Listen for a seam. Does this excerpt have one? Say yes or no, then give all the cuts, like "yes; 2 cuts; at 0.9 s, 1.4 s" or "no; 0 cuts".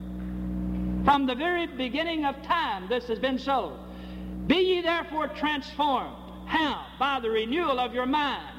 no; 0 cuts